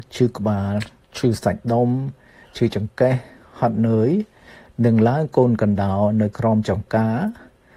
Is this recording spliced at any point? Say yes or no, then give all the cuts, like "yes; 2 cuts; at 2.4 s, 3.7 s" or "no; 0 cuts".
no; 0 cuts